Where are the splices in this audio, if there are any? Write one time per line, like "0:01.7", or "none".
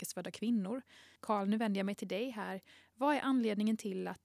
0:01.2